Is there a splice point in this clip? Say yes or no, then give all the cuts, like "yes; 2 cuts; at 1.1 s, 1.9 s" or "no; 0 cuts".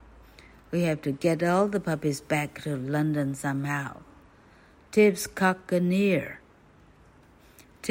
no; 0 cuts